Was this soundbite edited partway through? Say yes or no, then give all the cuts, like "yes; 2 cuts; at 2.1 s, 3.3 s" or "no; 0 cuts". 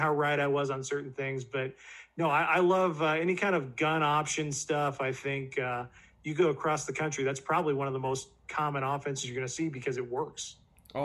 no; 0 cuts